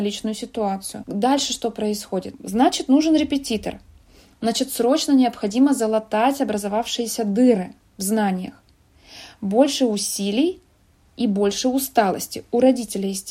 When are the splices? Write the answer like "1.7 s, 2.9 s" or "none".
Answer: none

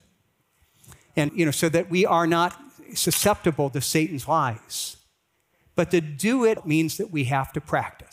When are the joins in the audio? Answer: 1.3 s, 6.6 s

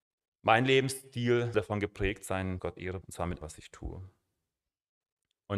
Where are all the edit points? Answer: 1.5 s, 2.6 s, 3.0 s, 3.4 s

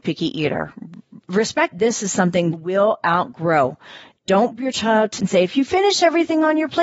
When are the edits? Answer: 1.7 s, 2.5 s, 4.6 s, 5.2 s

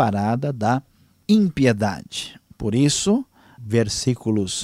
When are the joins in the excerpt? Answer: 3.5 s

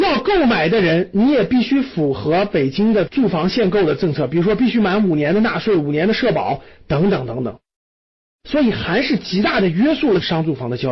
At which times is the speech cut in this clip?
none

